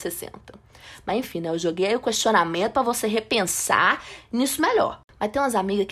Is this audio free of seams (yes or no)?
yes